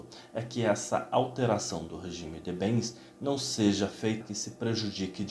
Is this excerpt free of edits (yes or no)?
no